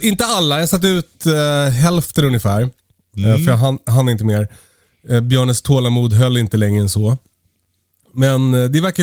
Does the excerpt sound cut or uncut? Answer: uncut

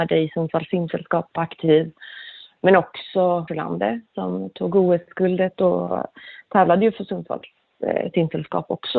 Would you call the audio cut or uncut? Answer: cut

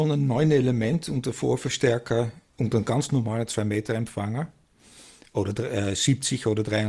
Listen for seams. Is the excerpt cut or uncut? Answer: uncut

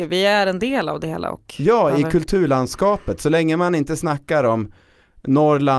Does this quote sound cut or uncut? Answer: uncut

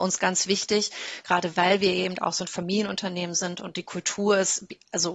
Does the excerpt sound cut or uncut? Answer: uncut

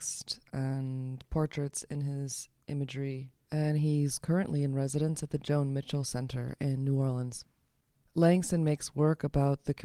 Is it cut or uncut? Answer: uncut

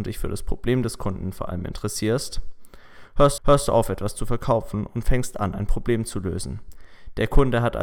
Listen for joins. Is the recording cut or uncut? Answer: cut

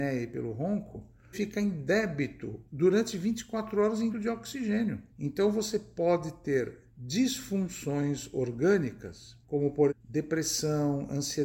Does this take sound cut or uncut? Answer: cut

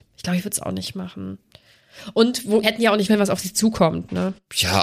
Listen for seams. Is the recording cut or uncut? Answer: cut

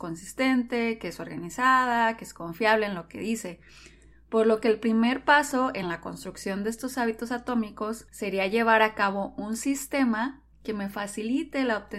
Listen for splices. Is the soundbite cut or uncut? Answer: uncut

